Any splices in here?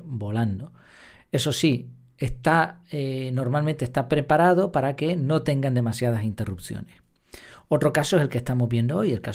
no; 0 cuts

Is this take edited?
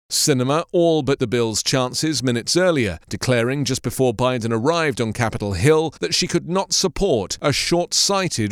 yes; 3 cuts; at 1.2 s, 3.0 s, 6.0 s

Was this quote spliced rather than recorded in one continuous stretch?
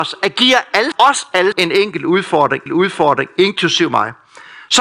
yes; 3 cuts; at 0.9 s, 1.5 s, 2.7 s

